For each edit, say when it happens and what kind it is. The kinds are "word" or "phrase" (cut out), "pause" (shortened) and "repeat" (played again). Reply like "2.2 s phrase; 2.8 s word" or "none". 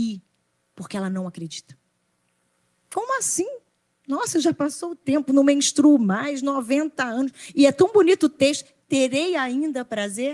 none